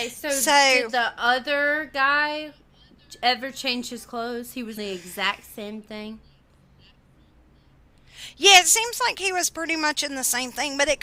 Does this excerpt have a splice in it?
yes; 1 cut; at 4.8 s

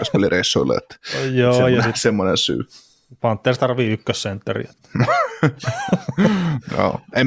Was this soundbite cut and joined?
no; 0 cuts

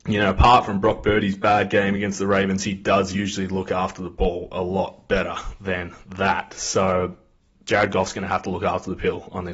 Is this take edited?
no; 0 cuts

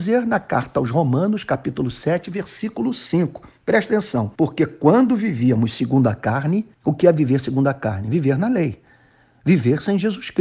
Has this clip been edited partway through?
yes; 2 cuts; at 4.3 s, 6.7 s

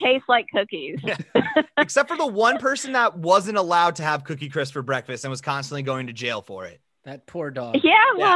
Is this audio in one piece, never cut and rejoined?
yes; 0 cuts

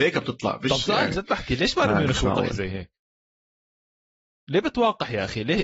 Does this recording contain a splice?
no; 0 cuts

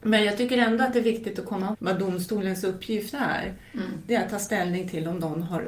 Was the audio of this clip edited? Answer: yes; 1 cut; at 1.7 s

